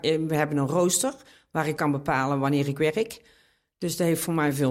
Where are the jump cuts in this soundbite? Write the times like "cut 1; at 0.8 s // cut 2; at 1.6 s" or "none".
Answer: cut 1; at 1.8 s

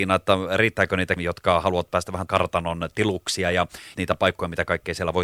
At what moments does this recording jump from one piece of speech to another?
cut 1; at 1.2 s // cut 2; at 2.3 s // cut 3; at 3.9 s

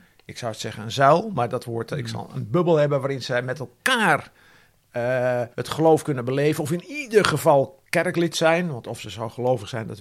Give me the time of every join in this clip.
cut 1; at 5.5 s

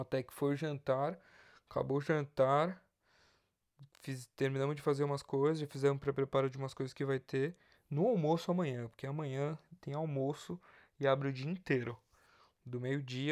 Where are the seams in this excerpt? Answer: none

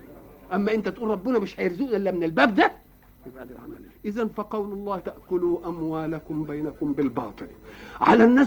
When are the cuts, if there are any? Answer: cut 1; at 3.9 s // cut 2; at 5.0 s

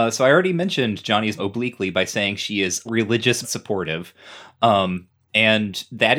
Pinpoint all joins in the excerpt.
cut 1; at 1.4 s // cut 2; at 2.9 s // cut 3; at 3.4 s

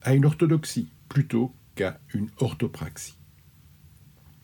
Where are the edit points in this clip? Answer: cut 1; at 1.0 s

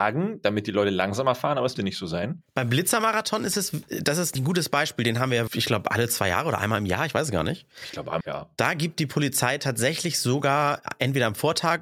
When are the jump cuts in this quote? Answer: cut 1; at 1.8 s // cut 2; at 2.5 s // cut 3; at 4.4 s // cut 4; at 5.5 s // cut 5; at 8.2 s

